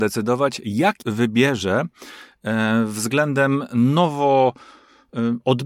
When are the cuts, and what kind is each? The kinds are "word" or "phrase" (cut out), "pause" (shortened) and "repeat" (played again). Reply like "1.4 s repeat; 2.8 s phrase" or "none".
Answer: 1.0 s word